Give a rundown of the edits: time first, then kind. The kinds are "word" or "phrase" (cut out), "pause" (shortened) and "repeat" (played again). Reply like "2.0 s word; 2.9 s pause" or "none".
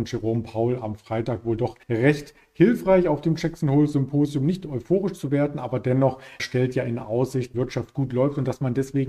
1.8 s pause; 6.4 s word; 7.5 s phrase